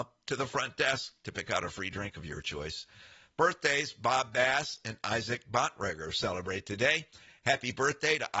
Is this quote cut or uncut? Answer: uncut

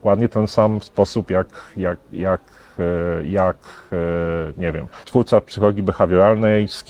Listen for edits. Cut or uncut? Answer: cut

